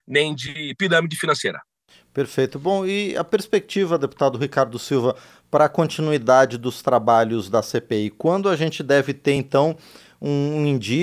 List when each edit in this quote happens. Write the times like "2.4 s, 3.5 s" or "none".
none